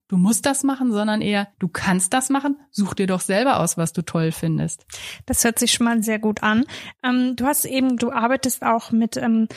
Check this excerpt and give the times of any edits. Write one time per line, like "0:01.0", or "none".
0:01.5
0:06.0
0:08.0